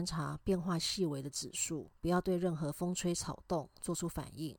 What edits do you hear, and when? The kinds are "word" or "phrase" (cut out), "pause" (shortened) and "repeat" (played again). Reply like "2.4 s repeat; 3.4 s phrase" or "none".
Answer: 2.0 s pause